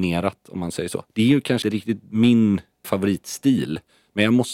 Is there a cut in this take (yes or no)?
yes